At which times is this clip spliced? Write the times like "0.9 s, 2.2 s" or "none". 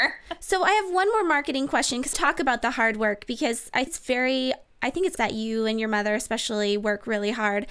2.1 s, 3.9 s, 5.2 s